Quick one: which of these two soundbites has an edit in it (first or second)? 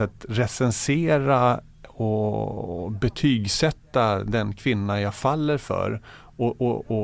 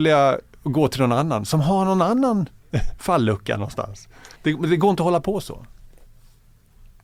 second